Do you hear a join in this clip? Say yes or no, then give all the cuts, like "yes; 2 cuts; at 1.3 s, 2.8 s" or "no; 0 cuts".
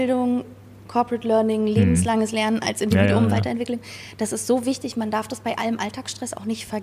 no; 0 cuts